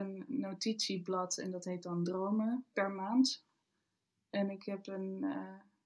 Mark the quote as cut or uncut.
uncut